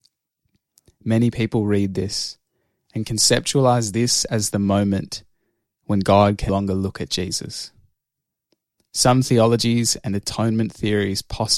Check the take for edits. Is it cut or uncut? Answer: cut